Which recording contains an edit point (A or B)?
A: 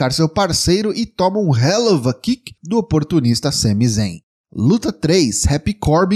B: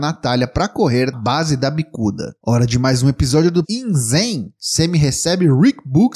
B